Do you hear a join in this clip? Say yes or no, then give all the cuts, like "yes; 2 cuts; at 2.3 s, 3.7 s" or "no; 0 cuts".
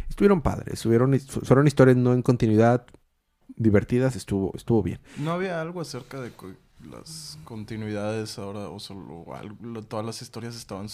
no; 0 cuts